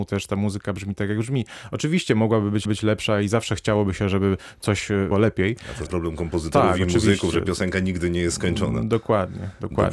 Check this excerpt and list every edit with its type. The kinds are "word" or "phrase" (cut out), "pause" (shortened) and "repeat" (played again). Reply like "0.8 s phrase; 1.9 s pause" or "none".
2.6 s repeat; 5.1 s word; 5.9 s word